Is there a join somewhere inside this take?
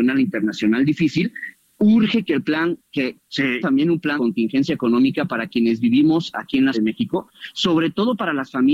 yes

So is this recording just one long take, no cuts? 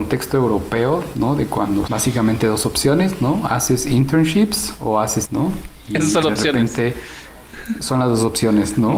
no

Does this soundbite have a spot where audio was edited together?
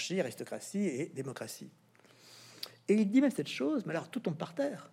no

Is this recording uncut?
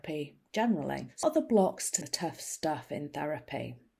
no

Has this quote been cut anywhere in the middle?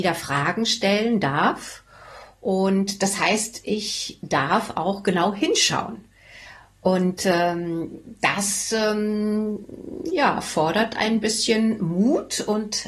no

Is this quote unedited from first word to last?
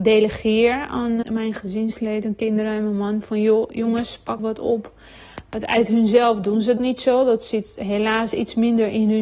no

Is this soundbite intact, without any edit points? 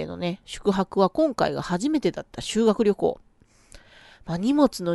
yes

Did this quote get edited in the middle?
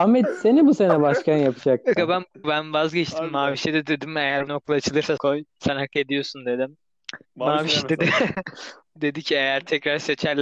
yes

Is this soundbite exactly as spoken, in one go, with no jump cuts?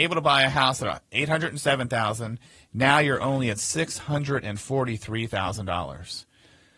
yes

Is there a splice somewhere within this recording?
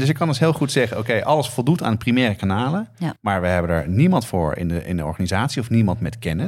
yes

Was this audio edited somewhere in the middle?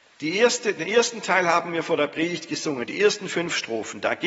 no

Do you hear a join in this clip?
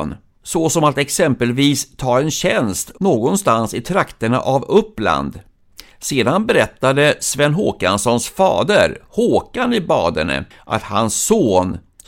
yes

